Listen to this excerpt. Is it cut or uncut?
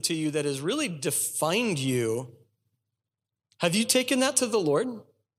uncut